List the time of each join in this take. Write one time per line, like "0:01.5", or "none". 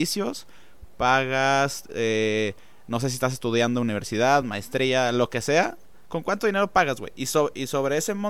none